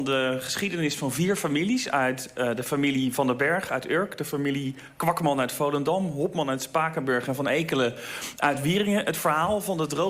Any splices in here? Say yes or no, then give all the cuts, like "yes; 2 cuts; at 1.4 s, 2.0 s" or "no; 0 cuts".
no; 0 cuts